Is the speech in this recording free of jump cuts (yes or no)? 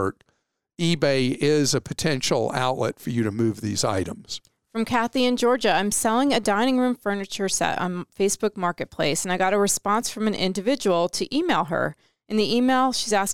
yes